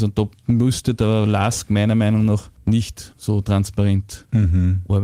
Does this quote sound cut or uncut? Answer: uncut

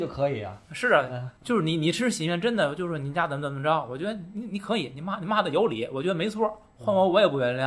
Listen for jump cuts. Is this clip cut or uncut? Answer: cut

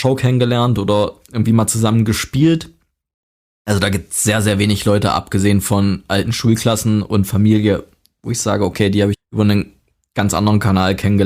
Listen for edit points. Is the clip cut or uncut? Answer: cut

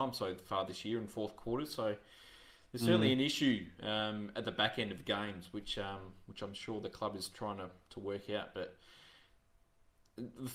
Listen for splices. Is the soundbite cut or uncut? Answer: uncut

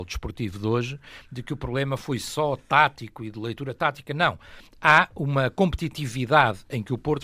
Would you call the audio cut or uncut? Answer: uncut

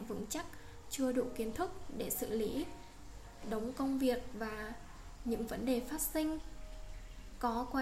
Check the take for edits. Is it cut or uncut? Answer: uncut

